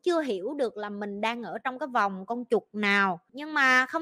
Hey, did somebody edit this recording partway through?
no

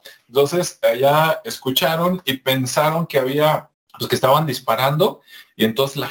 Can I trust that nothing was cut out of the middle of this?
no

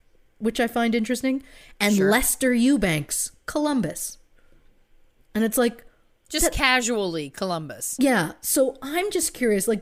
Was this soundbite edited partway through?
no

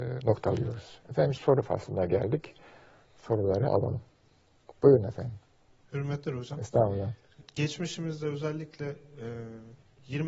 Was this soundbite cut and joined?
yes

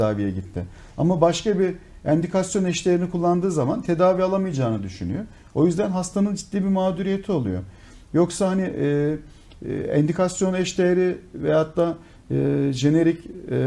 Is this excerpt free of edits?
yes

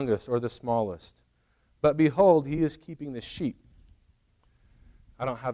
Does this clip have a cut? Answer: no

